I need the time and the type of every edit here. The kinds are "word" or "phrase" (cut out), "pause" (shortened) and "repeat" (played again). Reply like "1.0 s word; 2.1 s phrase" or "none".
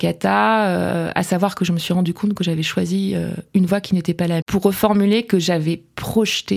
4.4 s word